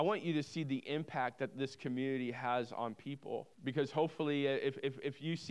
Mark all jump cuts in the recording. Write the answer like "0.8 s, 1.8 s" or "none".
3.5 s